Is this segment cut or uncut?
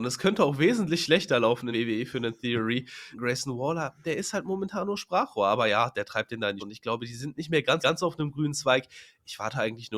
cut